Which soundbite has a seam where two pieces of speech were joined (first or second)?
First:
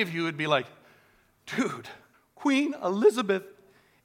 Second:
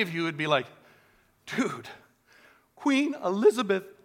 first